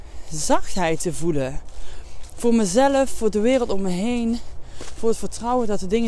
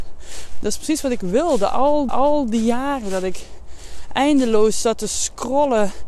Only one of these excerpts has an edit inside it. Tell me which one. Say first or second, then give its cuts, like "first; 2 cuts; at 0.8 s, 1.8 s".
second; 1 cut; at 2.1 s